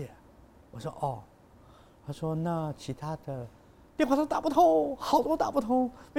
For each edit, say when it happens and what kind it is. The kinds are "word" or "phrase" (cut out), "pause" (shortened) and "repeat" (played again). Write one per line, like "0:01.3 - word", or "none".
none